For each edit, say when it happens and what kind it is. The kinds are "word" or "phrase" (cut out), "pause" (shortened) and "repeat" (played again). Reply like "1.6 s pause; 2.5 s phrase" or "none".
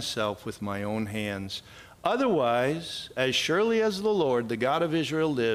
none